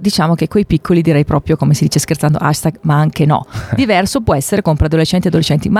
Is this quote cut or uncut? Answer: uncut